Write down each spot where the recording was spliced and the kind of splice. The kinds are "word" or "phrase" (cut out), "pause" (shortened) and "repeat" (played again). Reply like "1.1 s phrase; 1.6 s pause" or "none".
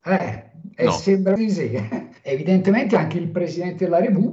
1.4 s word; 2.2 s pause